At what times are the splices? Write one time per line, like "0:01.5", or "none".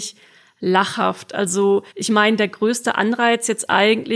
0:01.9